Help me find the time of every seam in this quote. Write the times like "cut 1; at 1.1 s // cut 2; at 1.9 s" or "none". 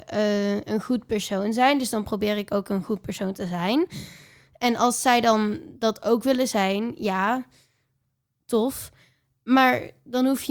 none